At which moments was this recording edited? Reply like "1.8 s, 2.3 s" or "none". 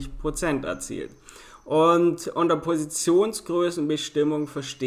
none

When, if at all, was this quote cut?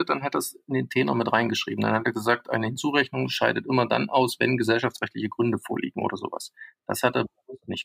none

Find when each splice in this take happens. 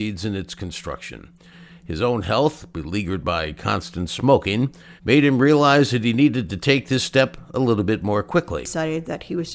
5.0 s

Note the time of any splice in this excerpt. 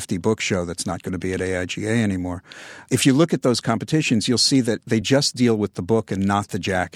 none

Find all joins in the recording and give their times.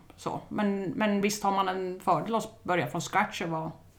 none

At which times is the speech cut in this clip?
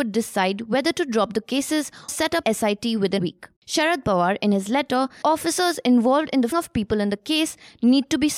2.1 s, 2.4 s, 3.2 s, 3.6 s, 5.2 s, 6.5 s

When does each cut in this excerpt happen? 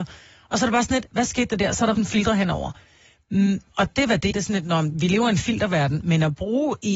1.9 s, 3.9 s, 4.3 s

